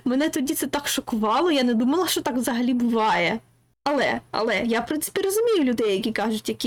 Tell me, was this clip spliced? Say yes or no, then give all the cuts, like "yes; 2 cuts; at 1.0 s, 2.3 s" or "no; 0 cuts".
no; 0 cuts